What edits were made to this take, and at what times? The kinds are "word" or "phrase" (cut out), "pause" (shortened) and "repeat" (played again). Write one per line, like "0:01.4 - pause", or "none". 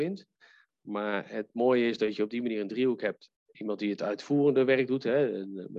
none